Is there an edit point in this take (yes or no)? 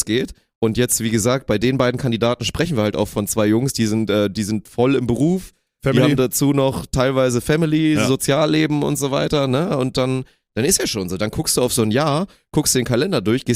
no